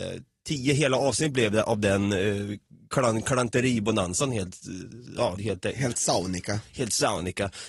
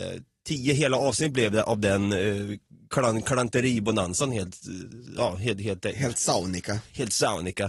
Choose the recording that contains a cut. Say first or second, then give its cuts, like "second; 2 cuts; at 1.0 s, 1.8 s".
first; 1 cut; at 5.4 s